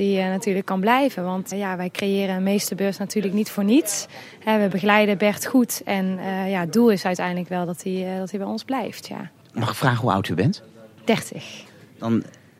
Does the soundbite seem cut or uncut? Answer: cut